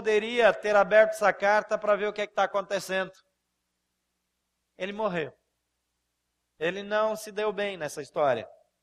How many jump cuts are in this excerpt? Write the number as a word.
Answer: zero